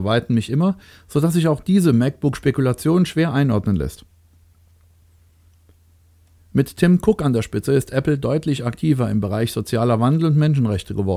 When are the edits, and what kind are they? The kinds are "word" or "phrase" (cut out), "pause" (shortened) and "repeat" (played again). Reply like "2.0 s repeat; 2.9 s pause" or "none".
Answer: none